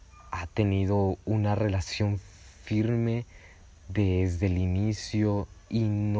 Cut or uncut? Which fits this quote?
uncut